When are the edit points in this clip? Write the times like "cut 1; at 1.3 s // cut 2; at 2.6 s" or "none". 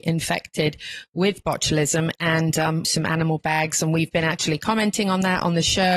cut 1; at 2.8 s // cut 2; at 3.4 s